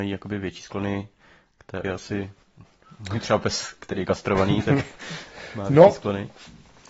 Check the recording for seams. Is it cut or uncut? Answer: cut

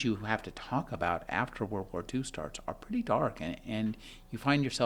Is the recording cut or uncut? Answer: uncut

